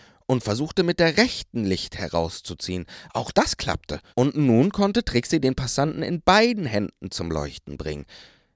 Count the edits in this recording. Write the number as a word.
one